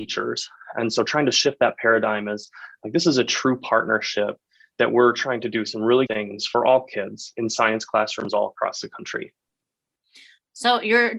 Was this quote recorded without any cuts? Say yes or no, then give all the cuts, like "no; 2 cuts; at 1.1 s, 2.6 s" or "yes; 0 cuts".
no; 1 cut; at 6.1 s